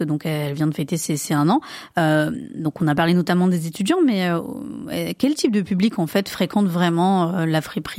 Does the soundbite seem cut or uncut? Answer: uncut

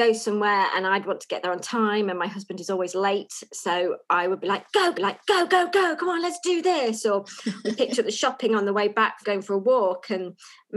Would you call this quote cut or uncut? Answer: cut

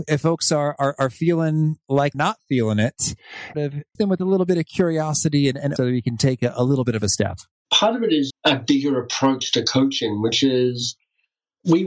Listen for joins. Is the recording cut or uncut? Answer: cut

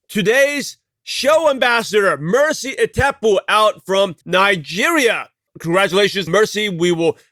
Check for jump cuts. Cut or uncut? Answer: cut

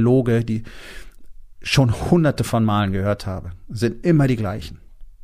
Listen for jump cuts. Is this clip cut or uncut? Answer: uncut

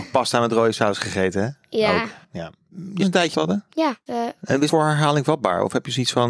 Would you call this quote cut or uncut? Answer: cut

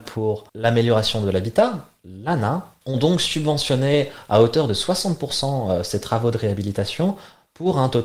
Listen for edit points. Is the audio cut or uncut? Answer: uncut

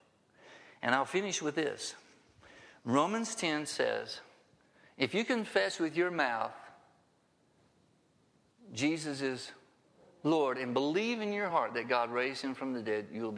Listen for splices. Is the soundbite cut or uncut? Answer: uncut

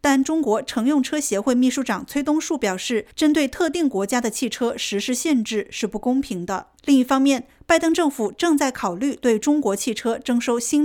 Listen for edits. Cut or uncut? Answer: cut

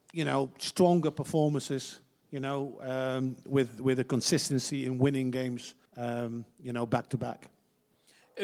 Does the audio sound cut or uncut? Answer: cut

